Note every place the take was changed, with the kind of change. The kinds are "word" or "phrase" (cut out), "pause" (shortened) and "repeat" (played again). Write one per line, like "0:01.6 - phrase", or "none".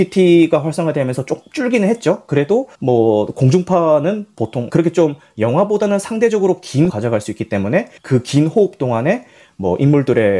0:02.7 - pause
0:04.7 - phrase
0:06.9 - word
0:08.0 - pause